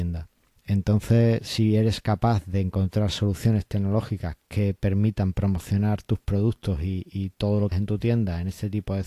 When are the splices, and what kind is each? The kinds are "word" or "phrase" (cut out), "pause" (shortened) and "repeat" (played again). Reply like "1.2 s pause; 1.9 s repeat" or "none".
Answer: 7.7 s word